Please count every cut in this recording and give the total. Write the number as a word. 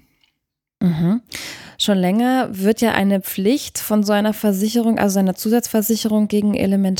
zero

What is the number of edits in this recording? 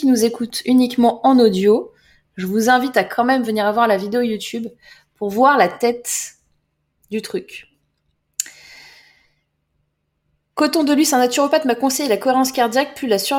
zero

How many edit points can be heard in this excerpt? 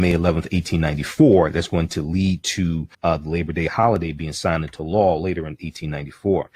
one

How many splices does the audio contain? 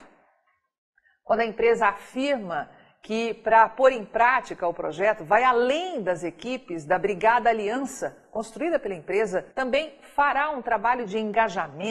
one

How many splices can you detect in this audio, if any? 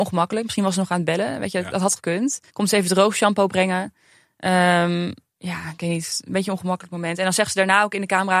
one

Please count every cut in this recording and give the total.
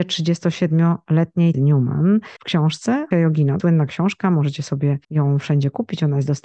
five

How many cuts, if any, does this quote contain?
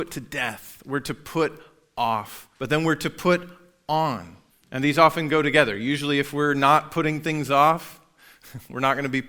two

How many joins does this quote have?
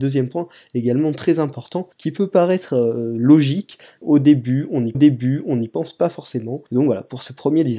four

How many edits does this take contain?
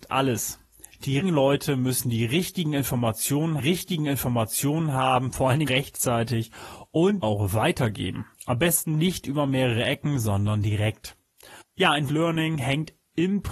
seven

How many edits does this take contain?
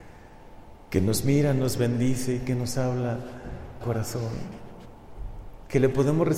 one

